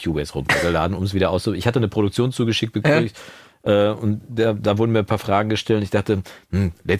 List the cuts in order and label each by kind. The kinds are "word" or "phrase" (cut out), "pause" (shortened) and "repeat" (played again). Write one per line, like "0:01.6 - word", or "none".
none